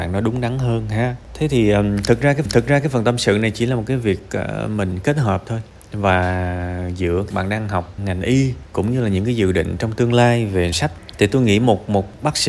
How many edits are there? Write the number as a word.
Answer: four